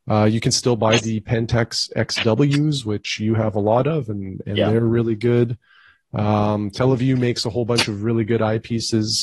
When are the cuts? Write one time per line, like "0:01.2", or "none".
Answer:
none